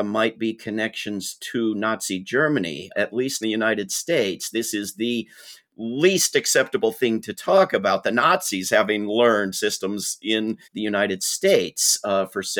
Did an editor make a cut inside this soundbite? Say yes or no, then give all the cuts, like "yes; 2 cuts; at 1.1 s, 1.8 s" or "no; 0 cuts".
yes; 4 cuts; at 2.9 s, 3.4 s, 9.5 s, 10.6 s